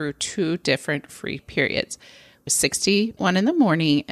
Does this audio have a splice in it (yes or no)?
yes